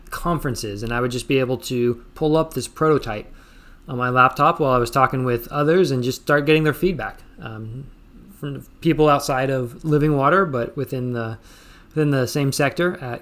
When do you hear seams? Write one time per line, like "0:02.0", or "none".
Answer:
none